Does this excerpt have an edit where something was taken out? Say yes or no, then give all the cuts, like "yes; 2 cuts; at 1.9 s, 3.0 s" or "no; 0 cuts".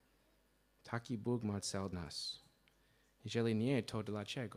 yes; 1 cut; at 1.9 s